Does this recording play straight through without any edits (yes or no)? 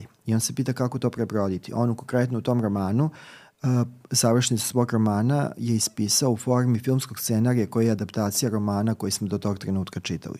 yes